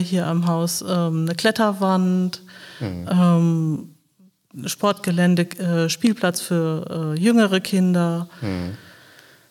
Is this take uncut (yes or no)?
yes